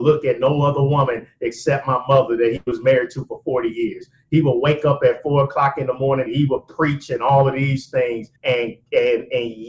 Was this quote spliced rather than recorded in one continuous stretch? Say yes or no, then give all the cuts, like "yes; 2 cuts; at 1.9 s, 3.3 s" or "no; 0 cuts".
yes; 2 cuts; at 6.3 s, 8.4 s